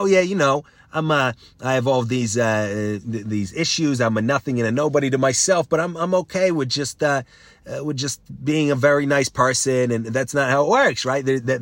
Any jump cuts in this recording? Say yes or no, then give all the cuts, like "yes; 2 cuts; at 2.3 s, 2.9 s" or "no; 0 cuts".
no; 0 cuts